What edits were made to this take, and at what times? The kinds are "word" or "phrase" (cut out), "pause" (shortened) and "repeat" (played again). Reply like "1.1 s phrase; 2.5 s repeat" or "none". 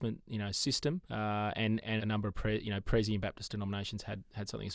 1.0 s pause; 2.0 s phrase